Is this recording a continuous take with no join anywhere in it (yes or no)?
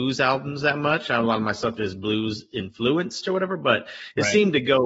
yes